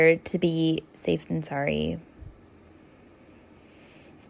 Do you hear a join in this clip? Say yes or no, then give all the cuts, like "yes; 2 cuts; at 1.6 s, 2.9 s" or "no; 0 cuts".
no; 0 cuts